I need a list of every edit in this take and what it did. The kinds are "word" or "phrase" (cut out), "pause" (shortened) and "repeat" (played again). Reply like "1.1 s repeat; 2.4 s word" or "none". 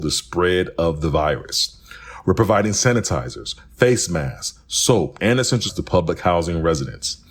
5.2 s word; 5.7 s word